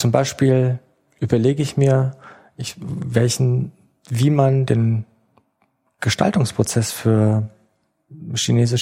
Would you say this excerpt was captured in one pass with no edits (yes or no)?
yes